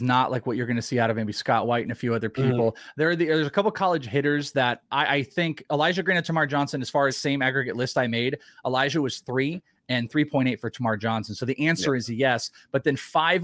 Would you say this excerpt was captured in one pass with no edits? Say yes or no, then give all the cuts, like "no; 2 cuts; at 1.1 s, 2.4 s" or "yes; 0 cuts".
no; 1 cut; at 7.1 s